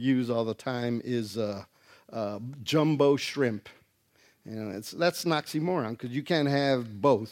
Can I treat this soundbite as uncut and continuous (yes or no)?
yes